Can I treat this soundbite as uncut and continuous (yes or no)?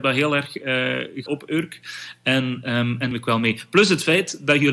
no